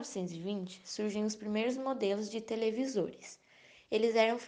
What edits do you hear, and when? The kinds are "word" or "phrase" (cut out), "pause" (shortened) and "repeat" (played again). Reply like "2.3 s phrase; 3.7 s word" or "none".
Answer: none